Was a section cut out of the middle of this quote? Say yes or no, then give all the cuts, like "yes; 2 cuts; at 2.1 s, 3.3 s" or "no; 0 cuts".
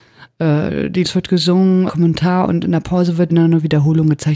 yes; 3 cuts; at 1.0 s, 1.9 s, 3.3 s